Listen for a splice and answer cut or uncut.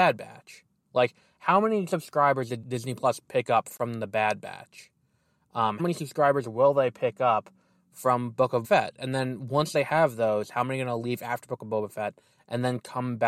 cut